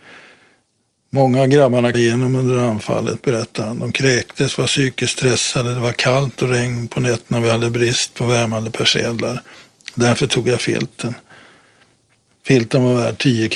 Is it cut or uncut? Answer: cut